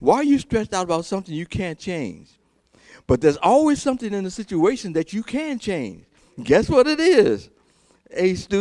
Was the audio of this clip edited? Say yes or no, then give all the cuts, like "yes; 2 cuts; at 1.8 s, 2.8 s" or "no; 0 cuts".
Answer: no; 0 cuts